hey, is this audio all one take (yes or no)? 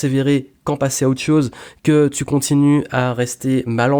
yes